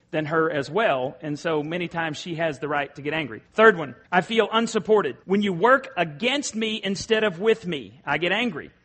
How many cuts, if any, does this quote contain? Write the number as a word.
three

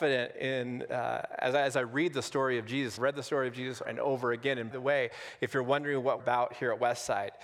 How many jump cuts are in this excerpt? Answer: four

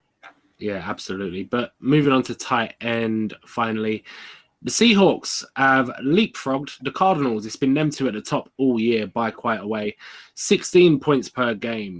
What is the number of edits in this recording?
zero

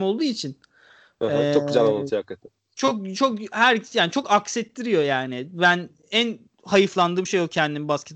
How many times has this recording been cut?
zero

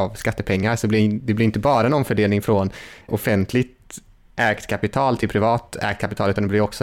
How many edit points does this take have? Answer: one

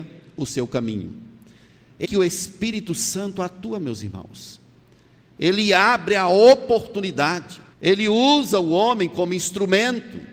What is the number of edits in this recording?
two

